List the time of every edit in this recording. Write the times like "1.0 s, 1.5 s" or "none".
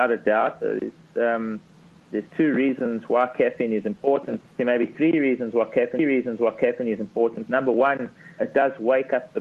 4.6 s, 6.0 s, 8.4 s